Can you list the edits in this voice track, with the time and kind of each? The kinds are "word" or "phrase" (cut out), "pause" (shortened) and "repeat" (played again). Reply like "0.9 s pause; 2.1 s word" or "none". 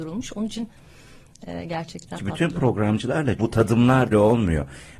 2.1 s word; 3.4 s word; 4.1 s phrase

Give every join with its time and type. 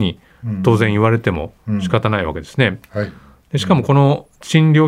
none

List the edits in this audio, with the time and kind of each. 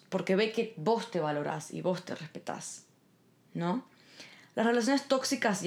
none

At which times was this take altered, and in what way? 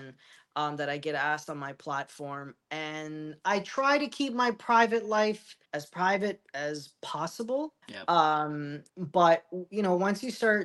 5.7 s pause; 7.8 s pause; 8.9 s pause

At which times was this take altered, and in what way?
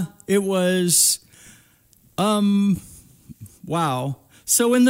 3.6 s pause

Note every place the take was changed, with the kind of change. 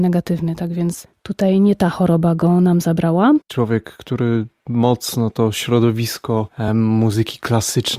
none

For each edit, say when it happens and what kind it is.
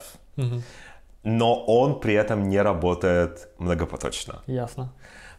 none

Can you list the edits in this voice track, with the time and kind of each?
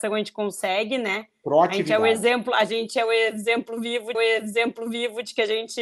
4.1 s repeat

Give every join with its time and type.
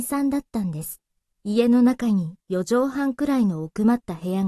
1.3 s pause

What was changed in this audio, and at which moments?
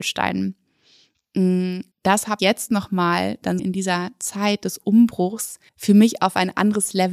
1.9 s pause; 2.4 s word; 3.6 s word; 5.7 s pause

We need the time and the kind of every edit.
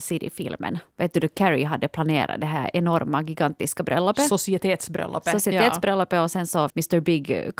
6.7 s word

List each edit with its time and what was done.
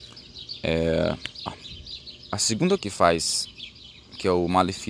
1.5 s word; 2.8 s word

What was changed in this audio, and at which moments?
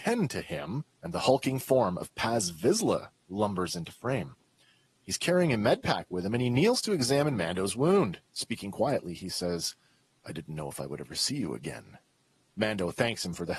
0.9 s pause; 8.2 s pause

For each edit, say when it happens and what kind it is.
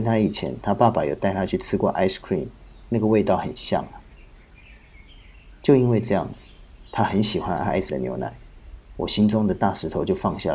7.9 s word

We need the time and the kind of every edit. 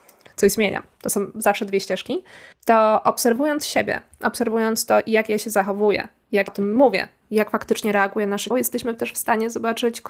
2.5 s pause; 6.5 s word; 8.5 s word

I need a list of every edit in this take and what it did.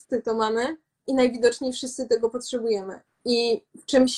none

